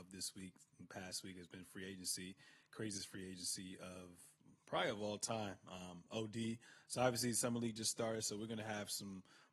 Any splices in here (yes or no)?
no